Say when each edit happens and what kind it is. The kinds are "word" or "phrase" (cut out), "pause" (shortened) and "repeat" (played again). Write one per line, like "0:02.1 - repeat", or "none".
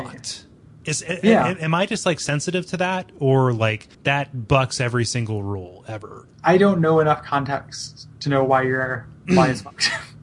0:03.9 - pause
0:06.3 - pause

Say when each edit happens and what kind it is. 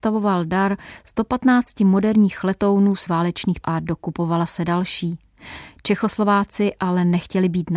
0:03.1 - word
0:03.6 - word

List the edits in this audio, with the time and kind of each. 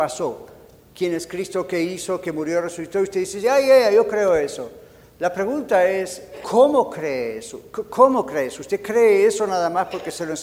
0:06.4 - word

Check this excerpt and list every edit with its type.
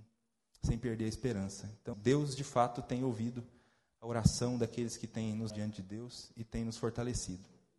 0:01.9 - word
0:05.5 - word

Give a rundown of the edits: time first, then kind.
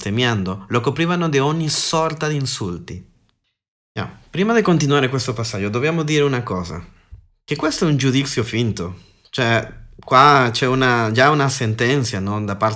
none

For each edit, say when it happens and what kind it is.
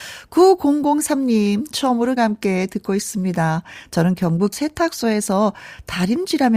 0:02.2 - word
0:04.5 - word

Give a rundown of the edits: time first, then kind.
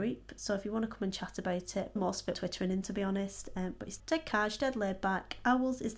0:02.0 - word
0:02.3 - phrase
0:02.8 - word
0:04.0 - word

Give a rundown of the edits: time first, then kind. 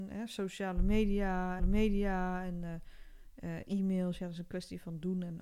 0:01.6 - repeat

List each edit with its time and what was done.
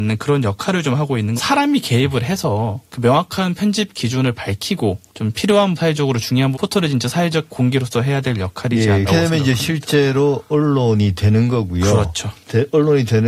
0:01.4 - phrase
0:02.9 - pause
0:05.1 - pause
0:05.8 - word
0:06.5 - phrase
0:09.0 - word

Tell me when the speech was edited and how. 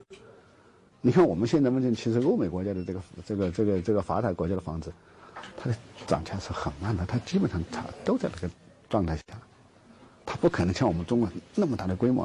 none

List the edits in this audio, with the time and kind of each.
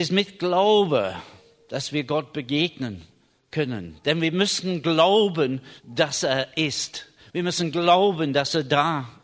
0:05.8 - pause

